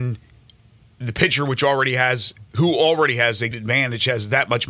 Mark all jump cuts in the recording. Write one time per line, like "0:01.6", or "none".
0:02.5
0:03.5